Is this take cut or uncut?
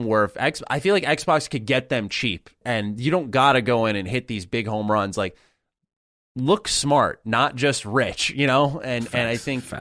cut